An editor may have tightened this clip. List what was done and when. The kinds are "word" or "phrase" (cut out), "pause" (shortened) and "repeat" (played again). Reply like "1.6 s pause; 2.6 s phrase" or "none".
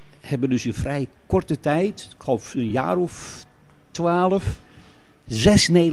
none